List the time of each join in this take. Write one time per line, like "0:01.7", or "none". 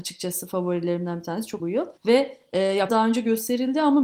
0:01.6
0:02.0
0:02.9